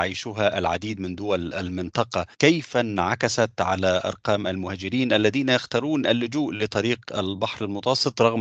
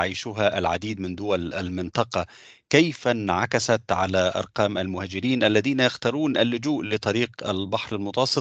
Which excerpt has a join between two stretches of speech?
first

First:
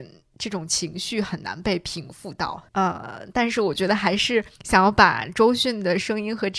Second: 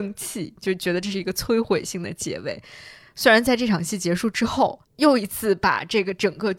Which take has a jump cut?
first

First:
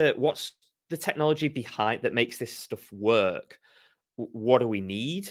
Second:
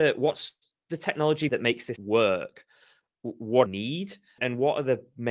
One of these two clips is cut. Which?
second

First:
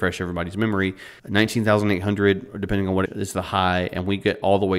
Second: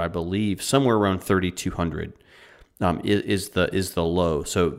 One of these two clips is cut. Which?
first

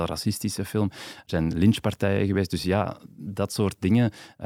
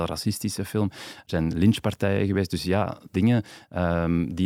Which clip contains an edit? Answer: second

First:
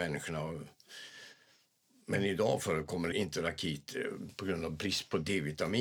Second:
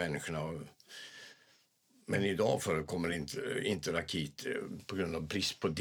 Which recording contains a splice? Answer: first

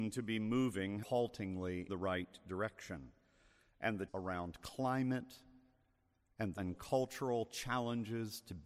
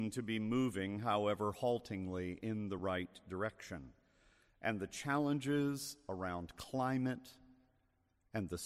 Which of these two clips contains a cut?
first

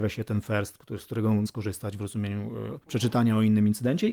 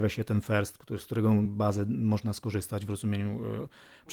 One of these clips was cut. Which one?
first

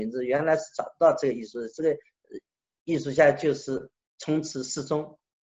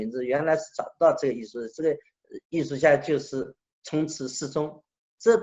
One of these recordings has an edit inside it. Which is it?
second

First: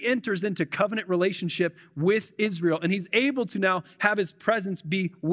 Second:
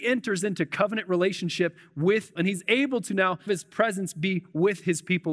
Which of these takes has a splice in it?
second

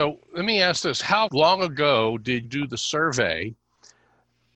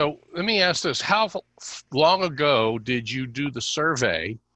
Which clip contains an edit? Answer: first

